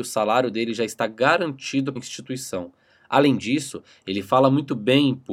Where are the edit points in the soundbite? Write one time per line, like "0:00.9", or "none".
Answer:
0:02.0